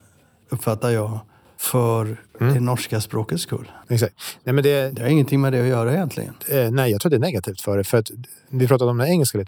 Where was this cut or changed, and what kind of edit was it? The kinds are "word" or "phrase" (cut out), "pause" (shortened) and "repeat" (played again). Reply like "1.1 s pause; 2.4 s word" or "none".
2.3 s pause; 3.8 s pause; 6.4 s pause